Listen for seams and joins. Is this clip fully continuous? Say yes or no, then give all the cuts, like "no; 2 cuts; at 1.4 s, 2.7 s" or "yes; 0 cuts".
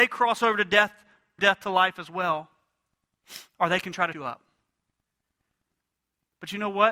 no; 2 cuts; at 1.4 s, 4.1 s